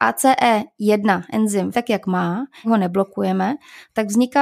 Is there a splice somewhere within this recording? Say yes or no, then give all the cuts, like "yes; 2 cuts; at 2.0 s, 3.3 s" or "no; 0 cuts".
yes; 2 cuts; at 1.7 s, 2.6 s